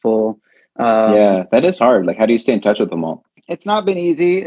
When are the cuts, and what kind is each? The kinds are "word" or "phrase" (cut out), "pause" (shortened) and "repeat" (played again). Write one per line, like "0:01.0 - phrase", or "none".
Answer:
none